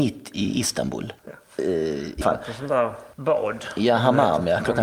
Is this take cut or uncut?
cut